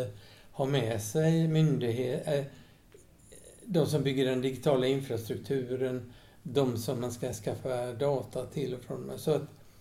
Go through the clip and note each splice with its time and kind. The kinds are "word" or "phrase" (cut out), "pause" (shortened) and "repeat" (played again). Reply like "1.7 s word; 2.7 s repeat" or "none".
none